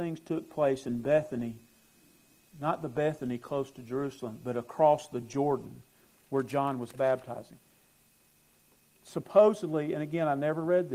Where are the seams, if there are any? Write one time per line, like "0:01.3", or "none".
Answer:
none